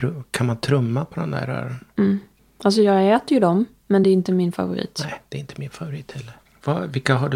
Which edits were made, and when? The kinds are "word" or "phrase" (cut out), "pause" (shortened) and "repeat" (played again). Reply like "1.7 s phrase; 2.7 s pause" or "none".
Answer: none